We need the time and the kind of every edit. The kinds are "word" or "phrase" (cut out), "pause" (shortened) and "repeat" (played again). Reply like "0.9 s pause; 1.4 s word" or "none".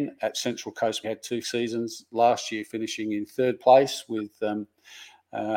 1.0 s phrase; 1.4 s word